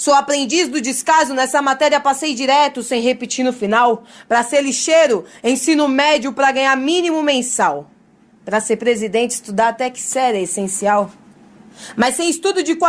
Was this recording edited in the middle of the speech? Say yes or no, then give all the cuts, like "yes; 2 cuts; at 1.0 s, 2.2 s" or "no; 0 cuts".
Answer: no; 0 cuts